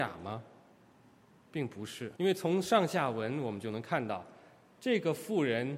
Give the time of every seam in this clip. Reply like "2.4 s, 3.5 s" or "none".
2.2 s